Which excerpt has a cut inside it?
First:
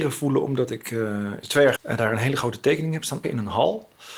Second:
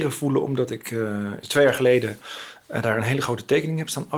first; 2 cuts; at 1.8 s, 3.2 s

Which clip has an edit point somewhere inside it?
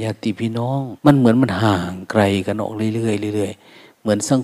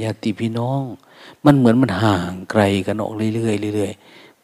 first; 1 cut; at 1.0 s

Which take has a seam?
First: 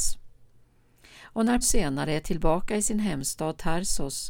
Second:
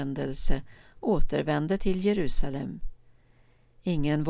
first; 1 cut; at 1.6 s

